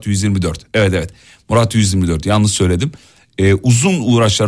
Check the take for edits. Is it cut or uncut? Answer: uncut